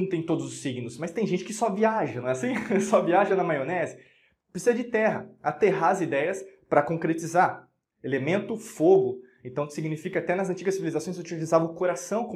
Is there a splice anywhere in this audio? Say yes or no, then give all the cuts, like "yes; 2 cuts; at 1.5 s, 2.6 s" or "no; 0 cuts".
no; 0 cuts